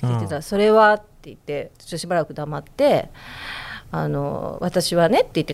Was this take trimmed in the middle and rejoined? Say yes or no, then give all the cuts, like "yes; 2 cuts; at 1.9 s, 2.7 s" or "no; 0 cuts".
yes; 1 cut; at 1.7 s